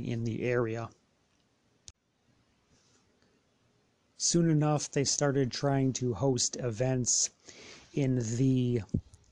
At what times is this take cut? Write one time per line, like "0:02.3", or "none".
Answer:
none